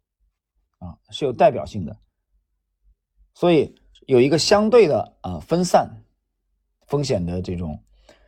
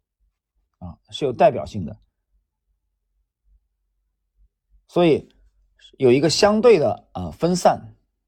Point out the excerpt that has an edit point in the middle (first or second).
first